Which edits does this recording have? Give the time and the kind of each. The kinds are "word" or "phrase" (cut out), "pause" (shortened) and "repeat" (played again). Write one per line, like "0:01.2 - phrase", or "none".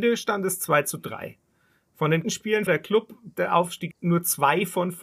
0:02.2 - word
0:02.7 - word
0:03.3 - word
0:03.9 - word